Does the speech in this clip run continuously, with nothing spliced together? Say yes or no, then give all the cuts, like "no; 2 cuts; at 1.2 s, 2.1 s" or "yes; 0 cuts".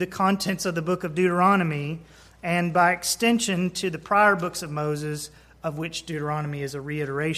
yes; 0 cuts